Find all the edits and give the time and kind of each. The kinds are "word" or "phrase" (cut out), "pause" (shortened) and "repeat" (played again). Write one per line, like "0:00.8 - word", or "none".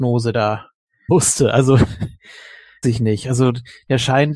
0:01.1 - word
0:02.8 - word